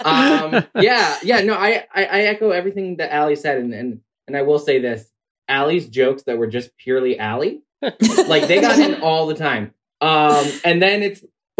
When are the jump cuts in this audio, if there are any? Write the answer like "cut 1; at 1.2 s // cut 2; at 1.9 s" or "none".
none